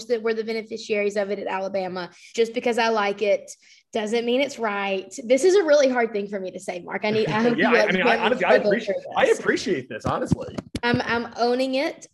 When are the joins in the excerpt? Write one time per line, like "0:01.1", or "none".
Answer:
0:02.3
0:03.7